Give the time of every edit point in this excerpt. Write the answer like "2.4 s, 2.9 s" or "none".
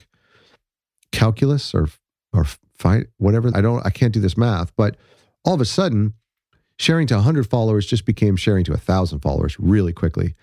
3.5 s